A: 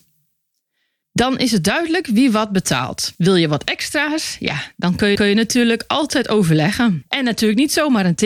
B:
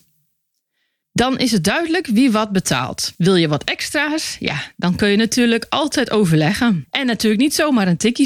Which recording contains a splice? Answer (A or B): A